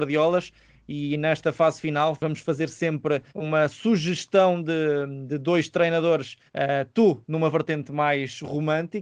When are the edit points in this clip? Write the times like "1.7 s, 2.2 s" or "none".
3.3 s, 6.5 s